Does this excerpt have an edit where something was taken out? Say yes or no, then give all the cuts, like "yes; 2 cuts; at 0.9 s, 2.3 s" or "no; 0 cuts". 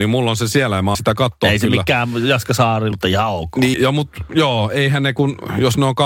yes; 3 cuts; at 0.9 s, 2.9 s, 3.7 s